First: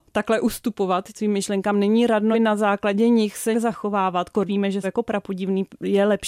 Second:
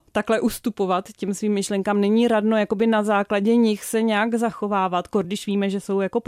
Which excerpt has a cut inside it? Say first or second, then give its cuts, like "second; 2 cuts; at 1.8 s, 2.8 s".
first; 5 cuts; at 1.2 s, 2.3 s, 3.5 s, 4.5 s, 4.8 s